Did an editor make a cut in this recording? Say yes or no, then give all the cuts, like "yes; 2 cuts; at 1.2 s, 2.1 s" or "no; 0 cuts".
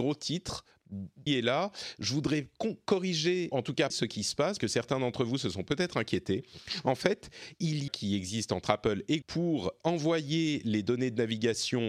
yes; 6 cuts; at 1.3 s, 3.5 s, 3.9 s, 4.6 s, 7.9 s, 9.2 s